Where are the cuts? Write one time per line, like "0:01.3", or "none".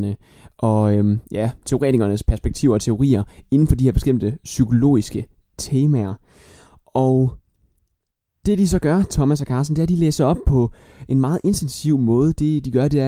none